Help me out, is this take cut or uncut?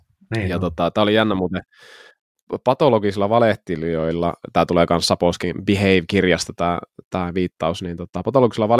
uncut